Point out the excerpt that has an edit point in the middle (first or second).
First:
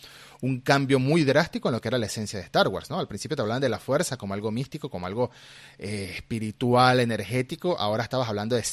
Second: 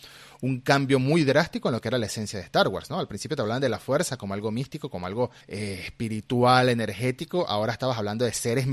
second